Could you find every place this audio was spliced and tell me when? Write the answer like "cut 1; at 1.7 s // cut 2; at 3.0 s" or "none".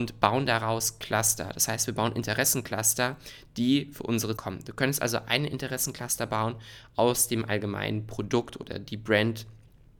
cut 1; at 4.4 s